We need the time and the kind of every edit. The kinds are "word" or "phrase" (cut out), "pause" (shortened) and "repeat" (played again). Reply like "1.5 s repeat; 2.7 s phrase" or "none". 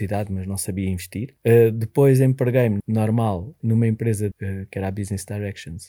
1.4 s pause; 2.8 s phrase; 3.6 s word; 4.3 s word